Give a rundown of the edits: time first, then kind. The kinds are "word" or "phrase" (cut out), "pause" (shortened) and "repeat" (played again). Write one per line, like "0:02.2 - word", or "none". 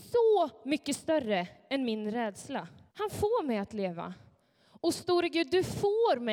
0:02.9 - pause